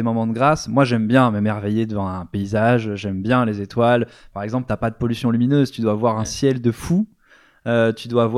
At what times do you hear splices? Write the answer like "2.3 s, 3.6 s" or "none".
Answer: none